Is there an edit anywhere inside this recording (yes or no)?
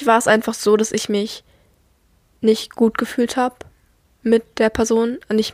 no